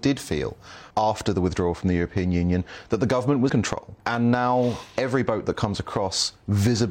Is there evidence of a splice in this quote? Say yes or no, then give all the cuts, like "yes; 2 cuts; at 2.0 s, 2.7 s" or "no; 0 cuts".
yes; 3 cuts; at 0.9 s, 3.5 s, 4.0 s